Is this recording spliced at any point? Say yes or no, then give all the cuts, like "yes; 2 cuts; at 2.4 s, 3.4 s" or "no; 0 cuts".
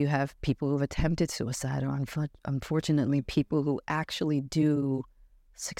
no; 0 cuts